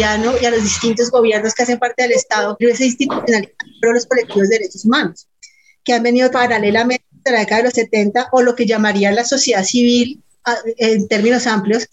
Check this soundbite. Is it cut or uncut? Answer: cut